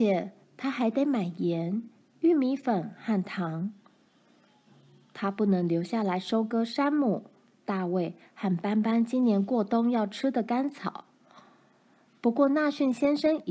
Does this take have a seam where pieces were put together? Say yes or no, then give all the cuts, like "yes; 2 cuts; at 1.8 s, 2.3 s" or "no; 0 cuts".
no; 0 cuts